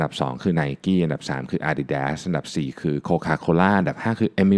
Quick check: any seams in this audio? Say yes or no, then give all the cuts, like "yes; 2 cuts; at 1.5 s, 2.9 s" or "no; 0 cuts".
no; 0 cuts